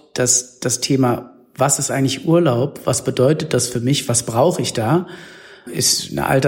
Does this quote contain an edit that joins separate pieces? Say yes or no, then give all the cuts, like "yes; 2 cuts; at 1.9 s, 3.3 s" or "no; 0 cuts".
no; 0 cuts